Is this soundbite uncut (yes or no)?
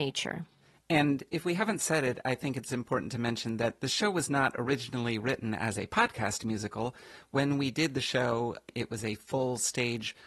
yes